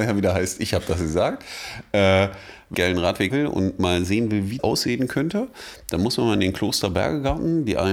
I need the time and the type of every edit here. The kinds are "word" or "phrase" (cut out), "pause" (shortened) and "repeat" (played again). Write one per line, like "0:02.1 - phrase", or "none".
0:02.7 - phrase
0:03.3 - word
0:04.6 - word